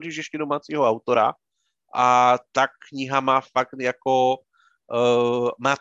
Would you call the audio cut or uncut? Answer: uncut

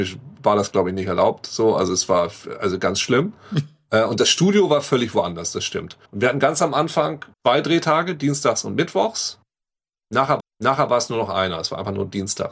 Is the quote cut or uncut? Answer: cut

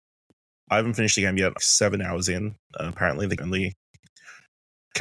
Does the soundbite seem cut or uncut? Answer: cut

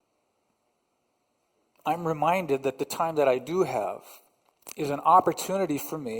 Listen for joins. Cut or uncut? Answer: uncut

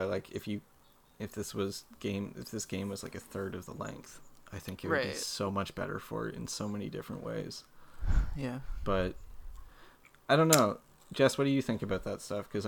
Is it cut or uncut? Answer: uncut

